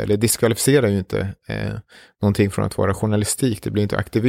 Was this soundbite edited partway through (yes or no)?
no